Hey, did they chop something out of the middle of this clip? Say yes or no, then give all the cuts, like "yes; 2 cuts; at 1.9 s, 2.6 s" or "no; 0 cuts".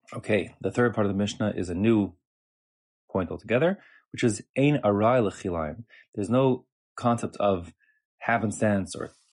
no; 0 cuts